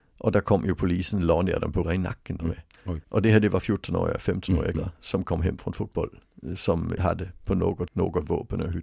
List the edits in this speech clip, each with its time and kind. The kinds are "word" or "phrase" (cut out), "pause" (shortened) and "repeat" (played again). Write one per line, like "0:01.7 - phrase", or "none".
0:01.8 - word
0:02.4 - phrase
0:03.0 - pause
0:04.7 - word
0:07.0 - word
0:07.9 - word